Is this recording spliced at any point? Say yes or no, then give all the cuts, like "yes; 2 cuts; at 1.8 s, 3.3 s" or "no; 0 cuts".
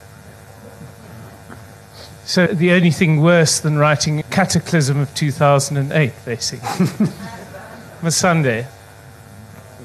yes; 2 cuts; at 2.5 s, 4.2 s